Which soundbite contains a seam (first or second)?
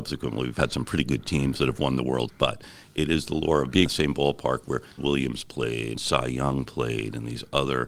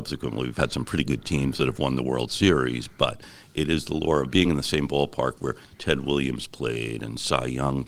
first